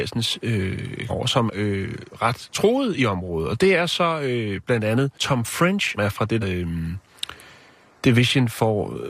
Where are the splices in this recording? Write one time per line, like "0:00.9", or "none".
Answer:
0:01.1
0:01.5
0:05.1
0:06.0
0:06.4